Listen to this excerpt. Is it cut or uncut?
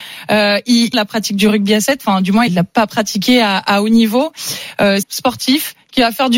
cut